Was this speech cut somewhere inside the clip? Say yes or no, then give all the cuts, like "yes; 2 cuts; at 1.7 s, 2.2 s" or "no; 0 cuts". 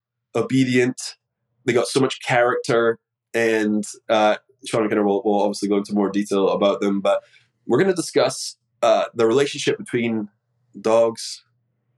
no; 0 cuts